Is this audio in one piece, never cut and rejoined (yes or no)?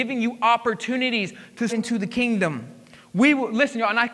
no